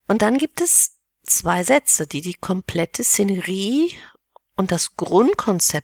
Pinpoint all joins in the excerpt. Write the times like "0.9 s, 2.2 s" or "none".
none